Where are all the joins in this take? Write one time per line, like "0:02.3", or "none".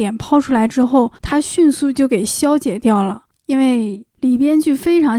0:01.2